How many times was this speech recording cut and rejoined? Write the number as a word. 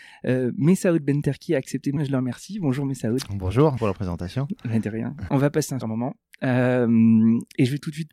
four